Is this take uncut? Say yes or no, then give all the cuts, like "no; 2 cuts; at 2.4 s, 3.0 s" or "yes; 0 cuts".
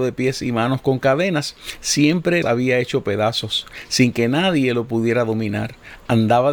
no; 1 cut; at 2.4 s